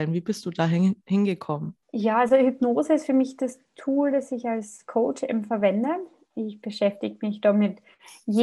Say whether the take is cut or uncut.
cut